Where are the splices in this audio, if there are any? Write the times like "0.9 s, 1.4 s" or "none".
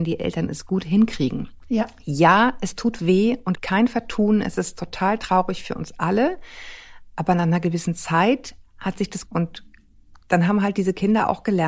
1.6 s, 3.0 s, 3.5 s, 9.3 s